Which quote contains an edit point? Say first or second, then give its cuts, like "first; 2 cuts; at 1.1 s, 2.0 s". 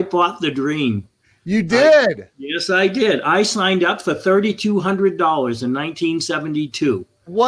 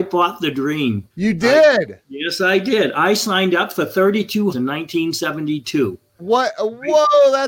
second; 2 cuts; at 1.1 s, 4.5 s